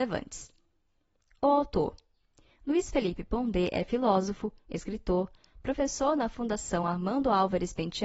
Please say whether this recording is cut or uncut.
uncut